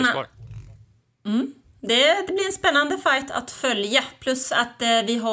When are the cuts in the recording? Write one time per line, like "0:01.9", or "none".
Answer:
none